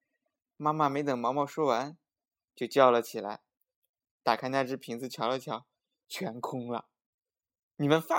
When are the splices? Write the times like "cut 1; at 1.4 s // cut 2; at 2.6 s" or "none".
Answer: none